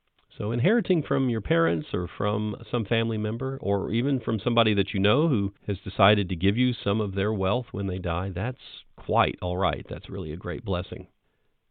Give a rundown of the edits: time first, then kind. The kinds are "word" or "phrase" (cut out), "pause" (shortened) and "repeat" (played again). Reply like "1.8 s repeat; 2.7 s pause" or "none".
5.6 s pause